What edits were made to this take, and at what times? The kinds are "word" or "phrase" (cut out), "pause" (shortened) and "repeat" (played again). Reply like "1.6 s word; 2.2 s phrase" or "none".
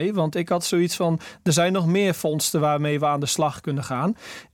none